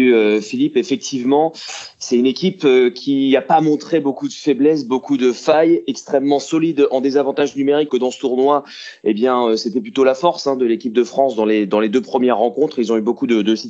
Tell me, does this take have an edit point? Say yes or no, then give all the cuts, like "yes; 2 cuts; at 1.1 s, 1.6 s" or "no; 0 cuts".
yes; 1 cut; at 7.9 s